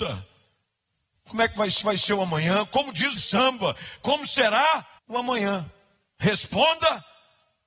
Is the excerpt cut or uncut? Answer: cut